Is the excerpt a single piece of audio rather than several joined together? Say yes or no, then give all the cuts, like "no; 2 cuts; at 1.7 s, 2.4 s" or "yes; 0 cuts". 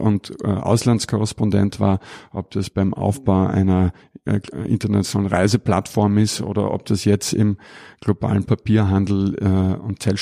yes; 0 cuts